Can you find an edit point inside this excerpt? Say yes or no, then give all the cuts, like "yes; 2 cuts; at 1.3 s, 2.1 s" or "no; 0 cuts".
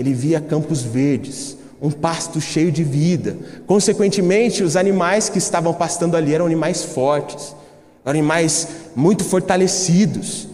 no; 0 cuts